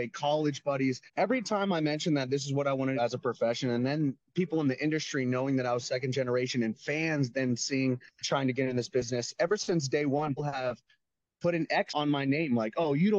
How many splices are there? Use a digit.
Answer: 5